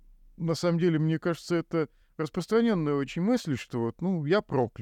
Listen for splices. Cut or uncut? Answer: uncut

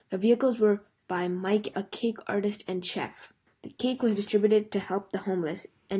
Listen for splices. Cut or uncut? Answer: cut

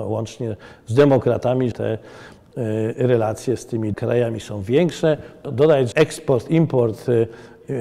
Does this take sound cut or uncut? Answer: cut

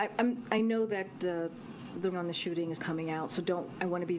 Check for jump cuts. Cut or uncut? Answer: cut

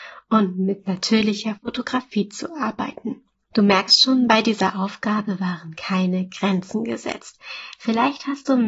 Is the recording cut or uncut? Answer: uncut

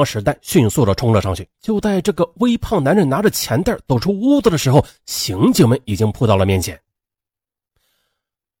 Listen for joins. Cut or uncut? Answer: cut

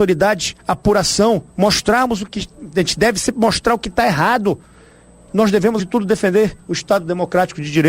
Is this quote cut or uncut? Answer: cut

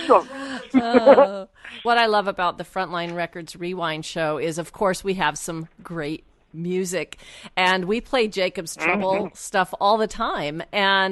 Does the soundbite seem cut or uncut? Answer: uncut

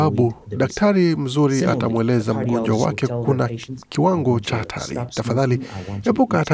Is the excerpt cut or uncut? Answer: uncut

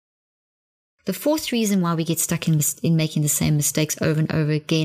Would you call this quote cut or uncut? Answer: uncut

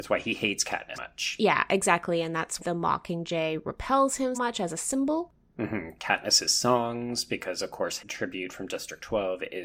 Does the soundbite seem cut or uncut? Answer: cut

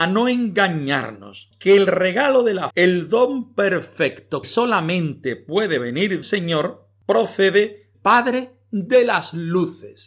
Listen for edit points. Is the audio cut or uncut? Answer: cut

